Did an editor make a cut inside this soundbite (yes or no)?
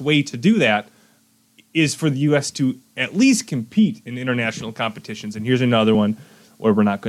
no